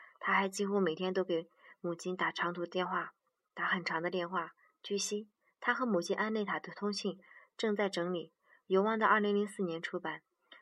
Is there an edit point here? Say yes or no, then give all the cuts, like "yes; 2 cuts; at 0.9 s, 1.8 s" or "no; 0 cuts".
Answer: no; 0 cuts